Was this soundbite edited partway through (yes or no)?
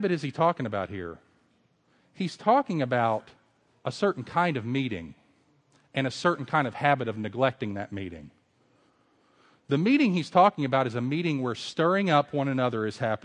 no